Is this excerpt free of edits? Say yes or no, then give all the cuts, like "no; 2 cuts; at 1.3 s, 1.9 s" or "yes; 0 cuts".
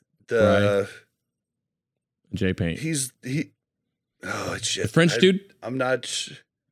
yes; 0 cuts